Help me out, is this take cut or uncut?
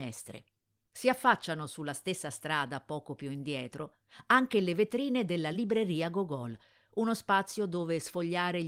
uncut